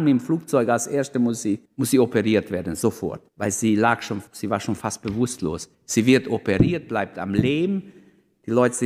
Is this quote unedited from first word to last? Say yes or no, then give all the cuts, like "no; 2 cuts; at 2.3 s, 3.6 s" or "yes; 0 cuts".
no; 4 cuts; at 1.7 s, 3.3 s, 4.3 s, 5.7 s